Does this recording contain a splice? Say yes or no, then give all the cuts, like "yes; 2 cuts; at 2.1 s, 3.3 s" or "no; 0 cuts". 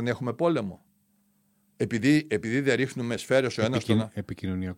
no; 0 cuts